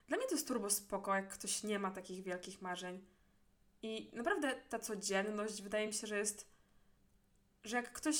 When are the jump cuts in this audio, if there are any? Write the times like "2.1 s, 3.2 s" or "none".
none